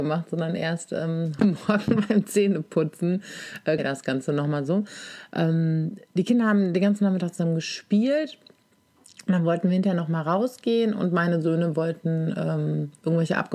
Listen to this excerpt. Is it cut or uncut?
cut